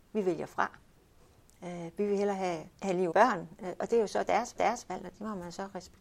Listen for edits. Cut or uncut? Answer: cut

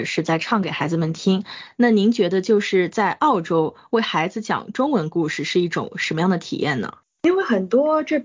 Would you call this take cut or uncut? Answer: cut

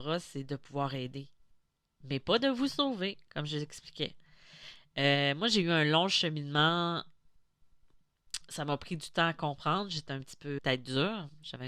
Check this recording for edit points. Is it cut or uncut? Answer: cut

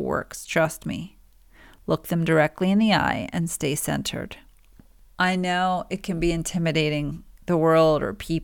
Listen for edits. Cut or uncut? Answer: uncut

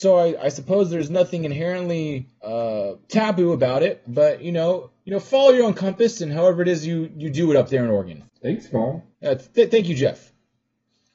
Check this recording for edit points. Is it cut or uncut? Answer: cut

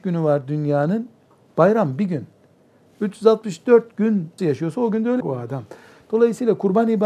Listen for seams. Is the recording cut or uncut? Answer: cut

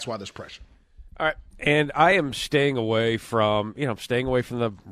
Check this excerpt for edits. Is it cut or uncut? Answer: uncut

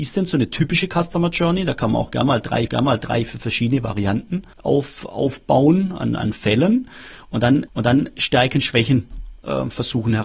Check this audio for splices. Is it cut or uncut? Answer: cut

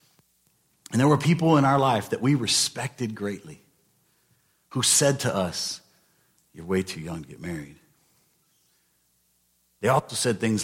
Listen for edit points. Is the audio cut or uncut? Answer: uncut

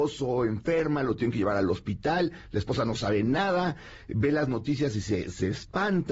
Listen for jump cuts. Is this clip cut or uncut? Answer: uncut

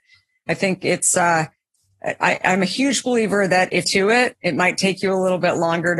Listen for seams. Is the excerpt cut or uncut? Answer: cut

